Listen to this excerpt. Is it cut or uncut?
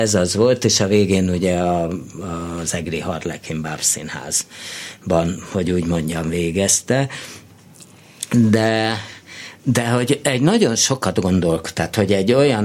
uncut